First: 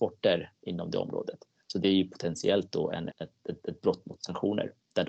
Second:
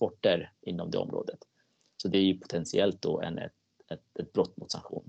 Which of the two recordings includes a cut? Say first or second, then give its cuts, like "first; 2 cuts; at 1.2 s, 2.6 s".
first; 4 cuts; at 1.6 s, 3.1 s, 3.6 s, 4.2 s